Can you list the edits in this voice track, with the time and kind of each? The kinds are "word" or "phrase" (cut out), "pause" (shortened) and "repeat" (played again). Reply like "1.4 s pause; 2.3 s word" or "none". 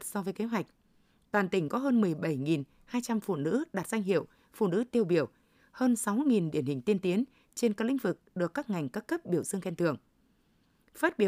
none